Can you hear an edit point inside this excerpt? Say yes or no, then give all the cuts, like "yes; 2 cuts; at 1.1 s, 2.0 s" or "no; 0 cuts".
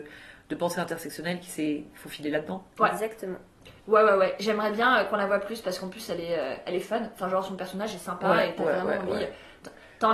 yes; 1 cut; at 3.8 s